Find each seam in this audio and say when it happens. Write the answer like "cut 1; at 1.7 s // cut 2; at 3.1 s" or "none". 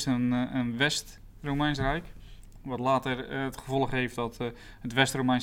none